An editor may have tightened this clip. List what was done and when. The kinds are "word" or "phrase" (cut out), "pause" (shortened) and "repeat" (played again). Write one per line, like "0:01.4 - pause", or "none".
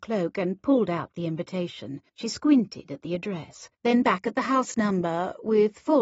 0:02.1 - pause
0:03.7 - pause